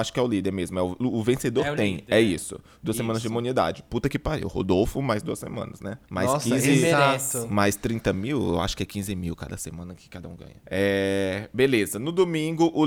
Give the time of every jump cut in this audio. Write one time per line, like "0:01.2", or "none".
0:06.0
0:10.6